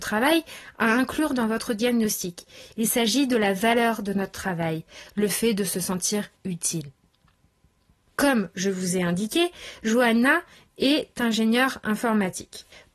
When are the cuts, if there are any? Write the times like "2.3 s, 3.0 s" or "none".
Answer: 6.3 s